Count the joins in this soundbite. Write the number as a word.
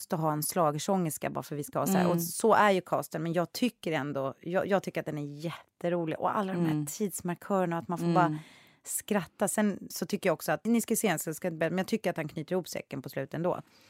two